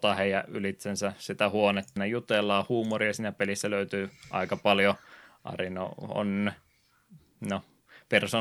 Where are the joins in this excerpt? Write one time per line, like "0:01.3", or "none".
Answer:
0:02.0